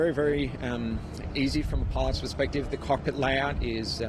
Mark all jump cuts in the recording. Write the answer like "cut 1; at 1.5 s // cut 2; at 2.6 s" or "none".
none